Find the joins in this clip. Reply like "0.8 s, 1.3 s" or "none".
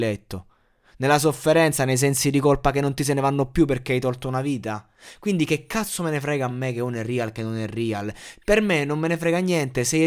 none